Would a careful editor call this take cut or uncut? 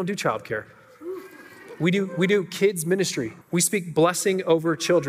cut